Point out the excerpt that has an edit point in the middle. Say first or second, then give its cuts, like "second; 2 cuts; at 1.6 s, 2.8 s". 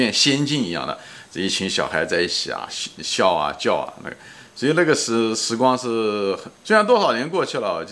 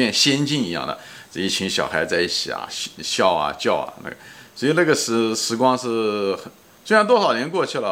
first; 1 cut; at 6.5 s